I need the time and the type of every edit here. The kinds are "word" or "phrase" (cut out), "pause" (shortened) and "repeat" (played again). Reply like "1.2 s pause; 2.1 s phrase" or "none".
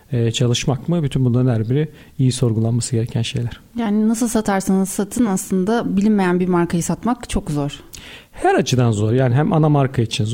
none